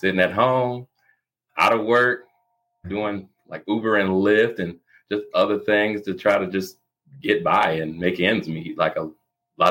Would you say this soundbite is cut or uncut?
uncut